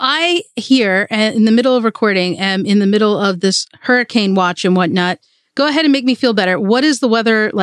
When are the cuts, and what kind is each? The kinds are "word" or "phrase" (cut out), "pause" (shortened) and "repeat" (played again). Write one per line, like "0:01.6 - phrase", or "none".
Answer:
none